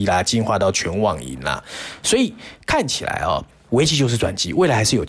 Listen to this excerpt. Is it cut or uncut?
uncut